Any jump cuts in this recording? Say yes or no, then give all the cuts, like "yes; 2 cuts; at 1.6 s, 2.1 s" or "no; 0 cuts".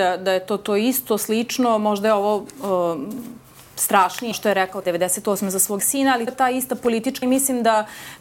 yes; 5 cuts; at 4.3 s, 4.8 s, 5.8 s, 6.3 s, 7.2 s